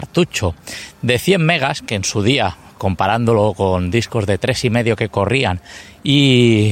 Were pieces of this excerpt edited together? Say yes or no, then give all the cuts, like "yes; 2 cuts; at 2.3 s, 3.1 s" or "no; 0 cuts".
no; 0 cuts